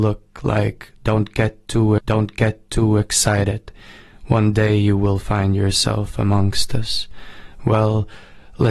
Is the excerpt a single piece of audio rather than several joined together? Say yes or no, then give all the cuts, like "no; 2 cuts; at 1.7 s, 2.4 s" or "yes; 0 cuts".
no; 1 cut; at 2.0 s